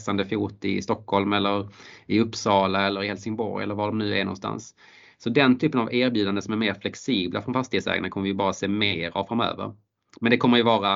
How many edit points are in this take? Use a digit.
0